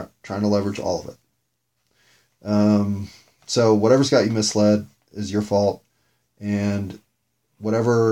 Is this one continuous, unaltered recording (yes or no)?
yes